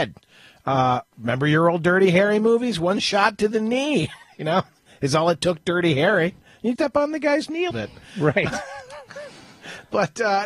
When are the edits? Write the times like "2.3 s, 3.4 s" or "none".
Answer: 1.1 s, 6.7 s, 7.7 s